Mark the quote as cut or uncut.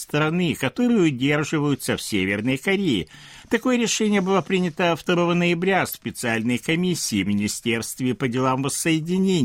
cut